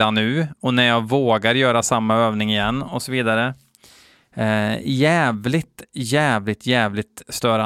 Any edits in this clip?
no; 0 cuts

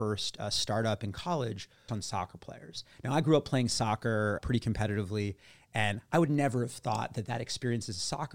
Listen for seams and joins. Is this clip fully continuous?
no; 2 cuts; at 1.9 s, 4.4 s

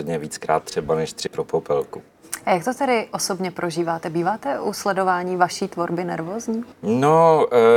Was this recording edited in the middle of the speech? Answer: yes; 2 cuts; at 1.3 s, 6.7 s

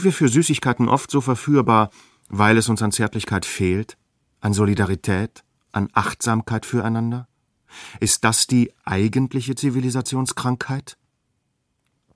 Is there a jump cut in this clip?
no; 0 cuts

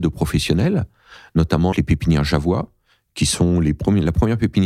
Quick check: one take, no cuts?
no; 1 cut; at 1.7 s

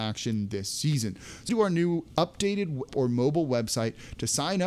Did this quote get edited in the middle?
yes; 2 cuts; at 1.5 s, 2.9 s

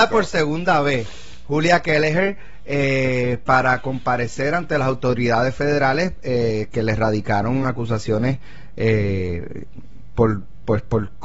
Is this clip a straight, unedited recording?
yes; 0 cuts

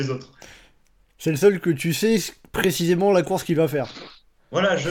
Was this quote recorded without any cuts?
yes; 0 cuts

